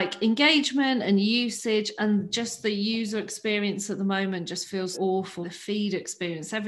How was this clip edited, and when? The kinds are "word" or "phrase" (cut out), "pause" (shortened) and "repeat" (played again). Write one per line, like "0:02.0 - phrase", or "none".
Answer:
0:04.9 - word
0:05.4 - word